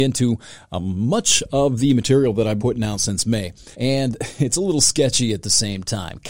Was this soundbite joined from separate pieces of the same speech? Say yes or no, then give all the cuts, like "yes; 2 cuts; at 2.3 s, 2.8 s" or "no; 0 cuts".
yes; 2 cuts; at 2.6 s, 3.7 s